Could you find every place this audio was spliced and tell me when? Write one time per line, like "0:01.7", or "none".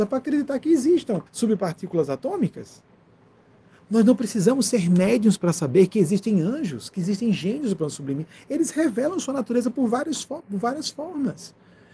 0:01.3